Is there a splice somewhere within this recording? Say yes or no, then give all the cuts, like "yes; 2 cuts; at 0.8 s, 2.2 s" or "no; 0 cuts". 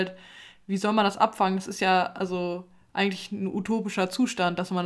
no; 0 cuts